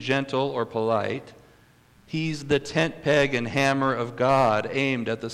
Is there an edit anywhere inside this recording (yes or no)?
no